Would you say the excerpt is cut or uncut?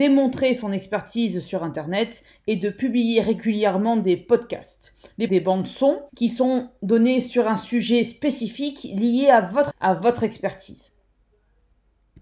cut